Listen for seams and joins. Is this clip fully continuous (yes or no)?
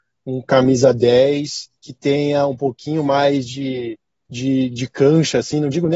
no